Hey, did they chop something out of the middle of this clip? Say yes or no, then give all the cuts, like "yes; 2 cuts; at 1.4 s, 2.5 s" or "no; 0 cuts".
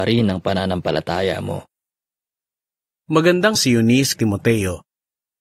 yes; 2 cuts; at 3.5 s, 4.2 s